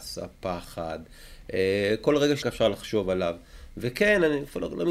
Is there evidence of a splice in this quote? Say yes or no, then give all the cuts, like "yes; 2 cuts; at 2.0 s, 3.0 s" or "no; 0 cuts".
yes; 1 cut; at 2.4 s